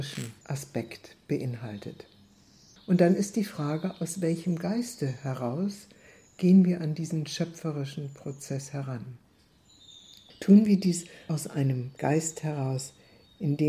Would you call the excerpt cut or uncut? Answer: uncut